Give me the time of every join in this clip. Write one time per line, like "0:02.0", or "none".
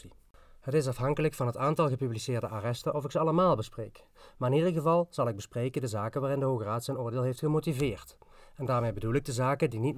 none